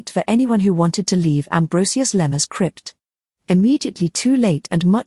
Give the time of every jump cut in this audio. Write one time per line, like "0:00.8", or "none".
none